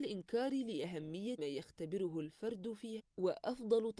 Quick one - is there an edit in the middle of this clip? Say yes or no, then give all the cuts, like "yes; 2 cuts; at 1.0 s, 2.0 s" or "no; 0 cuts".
yes; 2 cuts; at 1.4 s, 3.0 s